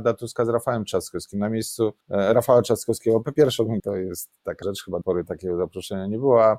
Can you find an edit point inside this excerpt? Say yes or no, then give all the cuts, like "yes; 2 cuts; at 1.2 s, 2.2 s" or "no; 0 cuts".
yes; 4 cuts; at 2.0 s, 3.8 s, 4.6 s, 5.0 s